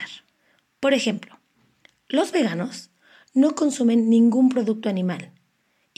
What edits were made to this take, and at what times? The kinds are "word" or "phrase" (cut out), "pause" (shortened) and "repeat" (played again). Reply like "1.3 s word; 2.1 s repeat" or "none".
none

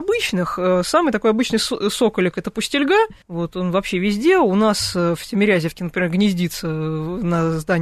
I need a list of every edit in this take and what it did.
3.2 s pause

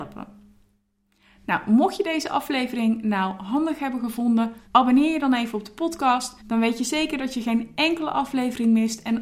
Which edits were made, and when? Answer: 4.7 s pause; 6.4 s pause

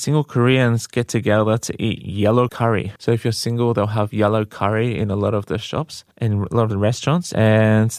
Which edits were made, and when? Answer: 3.0 s pause; 6.1 s pause

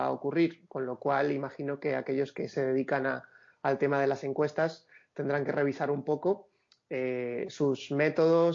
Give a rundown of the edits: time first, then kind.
none

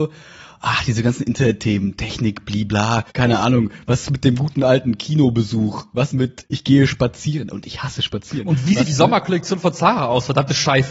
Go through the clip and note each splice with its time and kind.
3.1 s pause; 6.1 s word; 6.4 s word; 8.9 s word

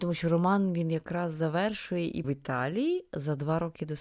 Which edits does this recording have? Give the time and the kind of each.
2.2 s word

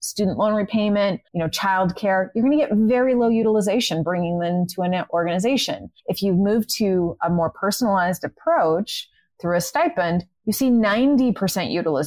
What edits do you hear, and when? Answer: 1.3 s pause; 6.0 s pause

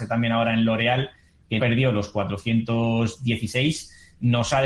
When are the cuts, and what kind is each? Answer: 1.6 s word

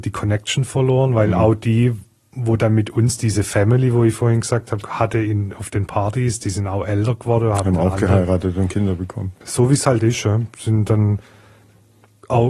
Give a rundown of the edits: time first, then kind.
4.8 s word

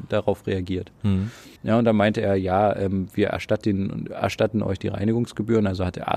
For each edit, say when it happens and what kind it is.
1.6 s pause

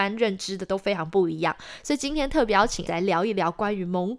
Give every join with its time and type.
2.9 s word

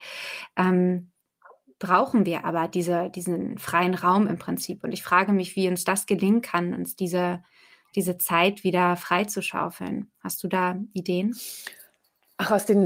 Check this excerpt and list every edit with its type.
none

